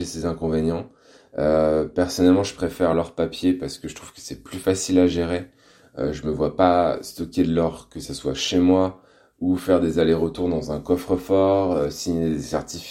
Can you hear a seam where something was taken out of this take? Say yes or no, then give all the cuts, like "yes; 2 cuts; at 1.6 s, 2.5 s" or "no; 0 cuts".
no; 0 cuts